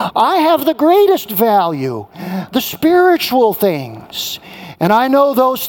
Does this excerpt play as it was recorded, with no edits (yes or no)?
yes